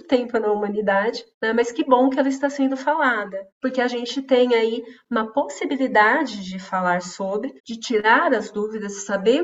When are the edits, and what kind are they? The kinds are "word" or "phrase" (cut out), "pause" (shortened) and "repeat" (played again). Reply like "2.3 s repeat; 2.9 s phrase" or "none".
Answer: 1.3 s pause; 3.5 s pause; 7.6 s pause